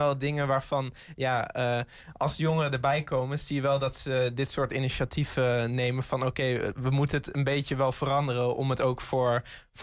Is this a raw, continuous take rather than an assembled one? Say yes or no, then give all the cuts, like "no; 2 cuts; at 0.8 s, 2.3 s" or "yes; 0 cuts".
yes; 0 cuts